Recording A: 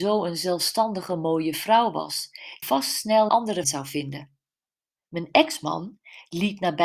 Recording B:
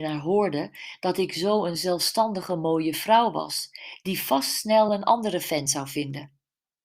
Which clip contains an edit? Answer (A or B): A